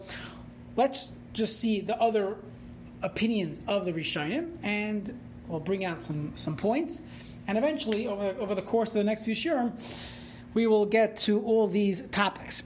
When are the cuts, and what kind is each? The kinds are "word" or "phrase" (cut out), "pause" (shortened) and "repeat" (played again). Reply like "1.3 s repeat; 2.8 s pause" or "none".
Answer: none